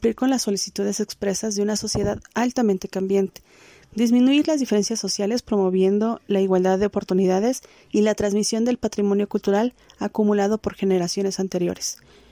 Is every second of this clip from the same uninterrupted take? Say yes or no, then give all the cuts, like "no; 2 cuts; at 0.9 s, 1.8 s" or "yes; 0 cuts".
yes; 0 cuts